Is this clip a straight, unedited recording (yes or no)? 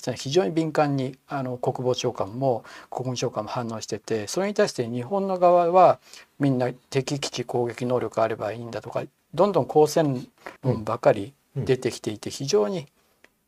no